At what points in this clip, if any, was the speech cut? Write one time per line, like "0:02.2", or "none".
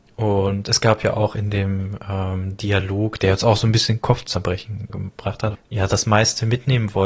0:04.9
0:05.5